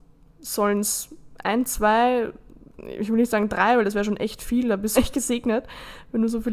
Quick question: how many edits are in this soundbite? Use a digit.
1